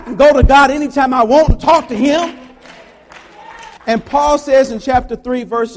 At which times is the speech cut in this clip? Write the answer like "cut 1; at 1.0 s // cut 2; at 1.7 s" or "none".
cut 1; at 3.8 s